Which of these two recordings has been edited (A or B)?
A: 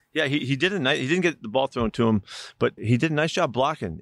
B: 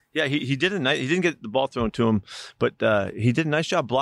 A